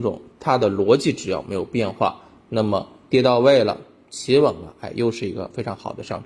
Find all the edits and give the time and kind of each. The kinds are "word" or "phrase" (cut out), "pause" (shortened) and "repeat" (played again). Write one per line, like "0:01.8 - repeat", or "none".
none